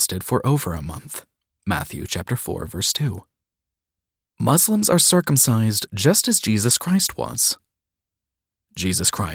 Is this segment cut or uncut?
uncut